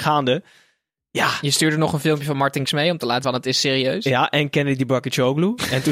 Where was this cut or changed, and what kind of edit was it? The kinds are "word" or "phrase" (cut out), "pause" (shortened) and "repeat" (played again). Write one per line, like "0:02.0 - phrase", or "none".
0:02.6 - word
0:03.2 - word

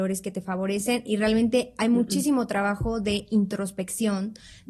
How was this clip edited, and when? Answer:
none

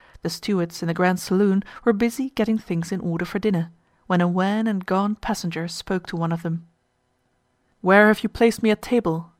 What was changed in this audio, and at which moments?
none

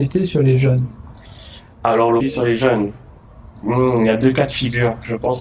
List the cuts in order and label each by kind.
0:02.2 - phrase

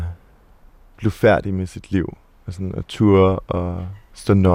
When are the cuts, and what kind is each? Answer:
none

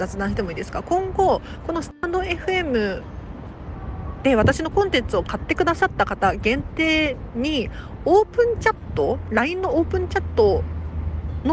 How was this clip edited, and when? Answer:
none

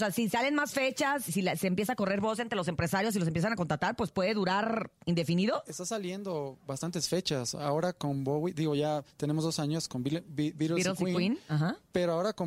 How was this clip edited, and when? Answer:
0:01.3 - word

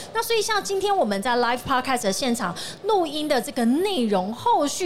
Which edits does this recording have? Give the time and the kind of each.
none

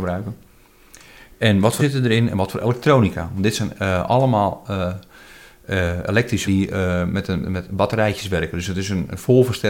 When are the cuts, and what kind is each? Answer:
0:01.8 - word
0:06.4 - word
0:07.4 - word

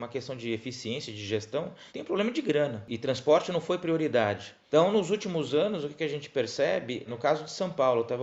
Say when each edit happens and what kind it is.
0:01.9 - pause

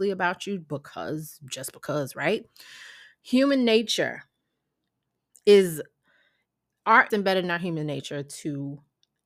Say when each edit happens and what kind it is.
0:07.1 - phrase

